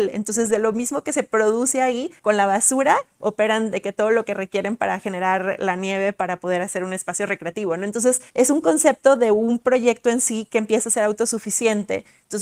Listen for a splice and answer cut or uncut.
cut